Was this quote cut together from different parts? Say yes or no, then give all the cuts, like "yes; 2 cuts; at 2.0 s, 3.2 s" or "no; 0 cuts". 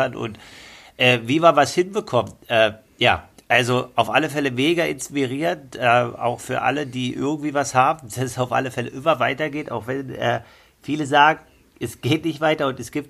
no; 0 cuts